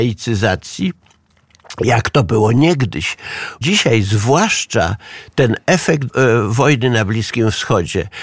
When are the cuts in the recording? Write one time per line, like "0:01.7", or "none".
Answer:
0:03.6
0:06.1

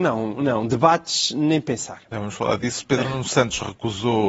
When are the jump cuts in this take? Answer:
none

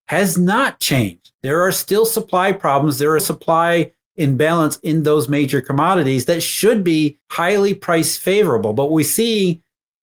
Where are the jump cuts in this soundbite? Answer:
0:01.3
0:03.2
0:07.2

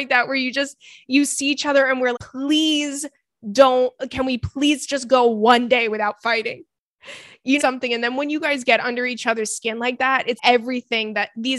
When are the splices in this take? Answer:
0:02.1
0:07.6
0:10.4

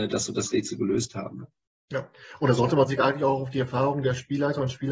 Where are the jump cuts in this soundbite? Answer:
none

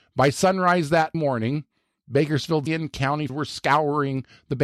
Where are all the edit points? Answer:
0:01.1
0:02.7
0:03.3

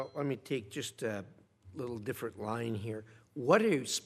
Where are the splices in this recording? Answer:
none

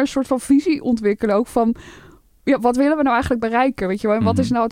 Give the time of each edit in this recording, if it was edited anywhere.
none

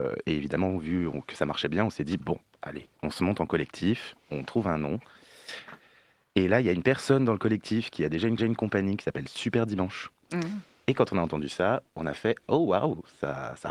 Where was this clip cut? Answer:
0:08.4

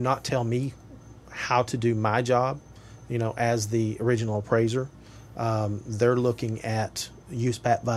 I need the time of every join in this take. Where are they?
none

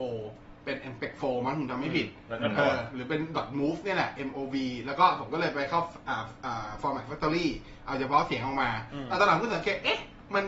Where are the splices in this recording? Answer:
none

